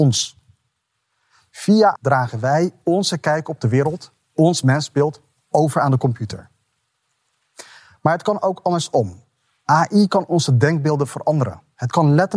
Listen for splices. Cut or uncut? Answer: cut